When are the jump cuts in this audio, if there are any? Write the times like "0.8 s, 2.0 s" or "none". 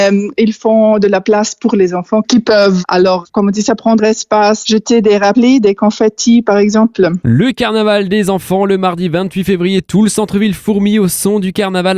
4.0 s